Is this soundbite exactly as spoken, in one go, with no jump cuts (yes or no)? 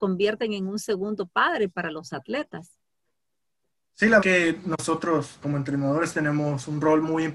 no